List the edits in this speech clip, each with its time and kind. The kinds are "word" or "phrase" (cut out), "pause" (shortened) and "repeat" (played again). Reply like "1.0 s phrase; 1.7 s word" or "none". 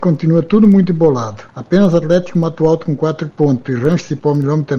1.5 s pause